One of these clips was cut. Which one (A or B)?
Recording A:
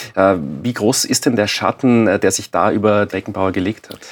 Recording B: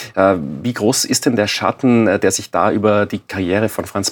A